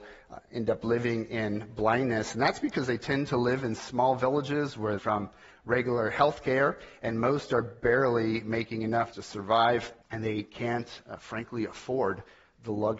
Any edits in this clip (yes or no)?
yes